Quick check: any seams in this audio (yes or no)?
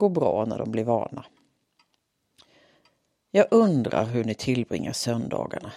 no